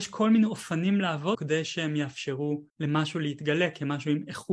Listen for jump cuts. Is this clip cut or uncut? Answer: cut